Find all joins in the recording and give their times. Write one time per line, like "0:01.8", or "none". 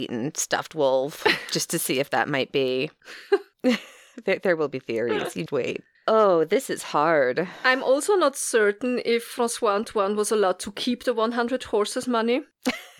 0:05.5
0:05.9